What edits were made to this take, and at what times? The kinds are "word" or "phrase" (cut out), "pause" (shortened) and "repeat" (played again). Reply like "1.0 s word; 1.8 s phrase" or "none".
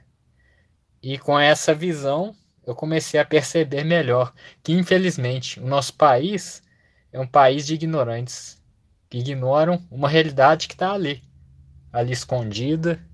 none